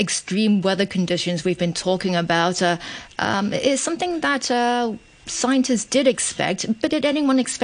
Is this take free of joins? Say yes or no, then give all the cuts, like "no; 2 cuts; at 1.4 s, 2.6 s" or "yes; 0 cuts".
yes; 0 cuts